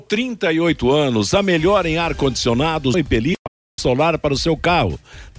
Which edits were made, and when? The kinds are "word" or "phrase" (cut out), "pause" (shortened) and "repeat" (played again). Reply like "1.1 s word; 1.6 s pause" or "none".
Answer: 2.9 s word; 3.8 s word